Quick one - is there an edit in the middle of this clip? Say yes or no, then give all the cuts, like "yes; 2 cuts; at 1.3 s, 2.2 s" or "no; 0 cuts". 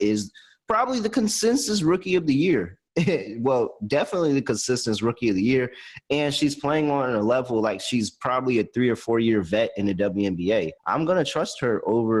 yes; 2 cuts; at 2.9 s, 10.8 s